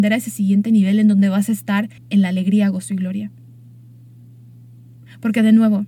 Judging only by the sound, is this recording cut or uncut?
cut